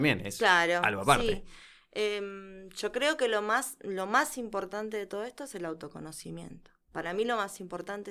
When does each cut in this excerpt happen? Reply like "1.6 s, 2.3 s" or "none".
6.8 s